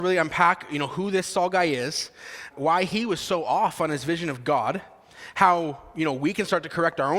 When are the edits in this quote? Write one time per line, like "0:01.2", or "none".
0:02.5